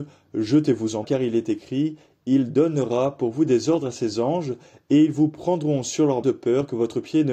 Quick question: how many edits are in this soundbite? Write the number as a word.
two